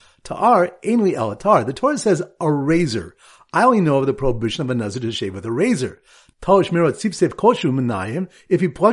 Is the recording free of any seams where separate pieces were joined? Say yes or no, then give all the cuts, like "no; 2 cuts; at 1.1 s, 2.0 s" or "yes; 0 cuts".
yes; 0 cuts